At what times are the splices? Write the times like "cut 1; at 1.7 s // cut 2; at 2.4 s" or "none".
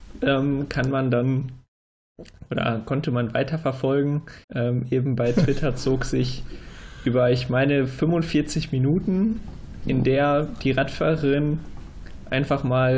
cut 1; at 4.4 s // cut 2; at 9.8 s